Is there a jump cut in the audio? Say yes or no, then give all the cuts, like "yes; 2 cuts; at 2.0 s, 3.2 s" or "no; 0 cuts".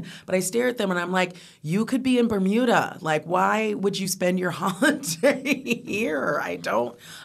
no; 0 cuts